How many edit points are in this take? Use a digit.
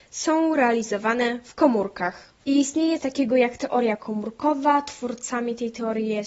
2